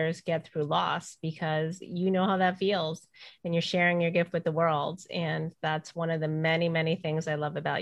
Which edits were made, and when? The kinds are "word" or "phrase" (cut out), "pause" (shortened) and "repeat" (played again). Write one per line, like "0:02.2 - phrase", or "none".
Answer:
none